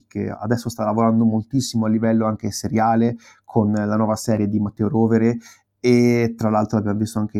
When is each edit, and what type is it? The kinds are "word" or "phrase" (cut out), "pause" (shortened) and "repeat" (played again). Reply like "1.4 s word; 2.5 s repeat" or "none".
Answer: none